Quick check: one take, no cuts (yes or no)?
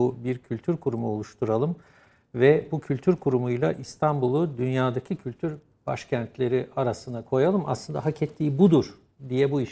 yes